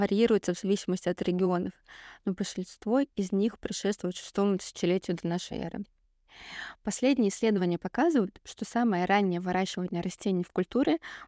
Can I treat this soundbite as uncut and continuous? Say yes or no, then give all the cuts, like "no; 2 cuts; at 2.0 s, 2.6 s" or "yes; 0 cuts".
yes; 0 cuts